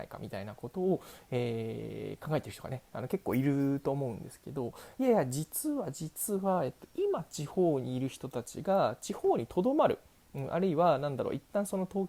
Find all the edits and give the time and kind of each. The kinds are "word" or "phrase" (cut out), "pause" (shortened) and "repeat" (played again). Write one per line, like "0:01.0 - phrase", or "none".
none